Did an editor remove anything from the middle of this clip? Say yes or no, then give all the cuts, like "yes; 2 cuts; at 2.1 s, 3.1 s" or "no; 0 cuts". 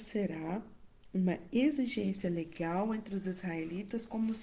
no; 0 cuts